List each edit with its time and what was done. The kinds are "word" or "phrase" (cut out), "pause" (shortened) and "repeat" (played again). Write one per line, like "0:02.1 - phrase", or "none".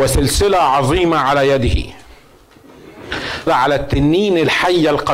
0:03.5 - word